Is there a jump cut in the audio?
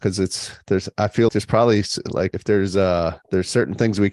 yes; 3 cuts; at 1.3 s, 2.3 s, 3.2 s

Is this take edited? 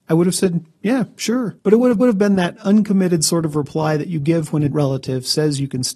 yes; 3 cuts; at 1.6 s, 2.0 s, 4.7 s

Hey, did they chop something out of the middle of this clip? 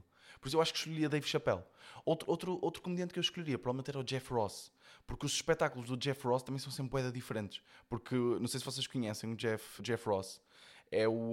yes; 1 cut; at 9.8 s

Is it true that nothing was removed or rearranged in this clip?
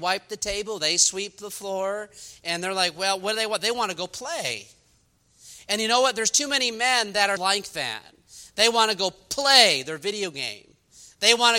no; 1 cut; at 7.4 s

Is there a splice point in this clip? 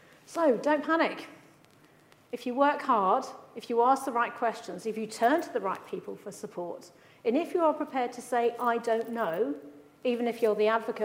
no; 0 cuts

